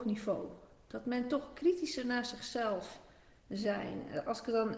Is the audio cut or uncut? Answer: uncut